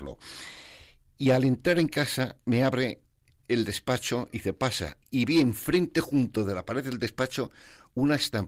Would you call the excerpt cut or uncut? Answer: cut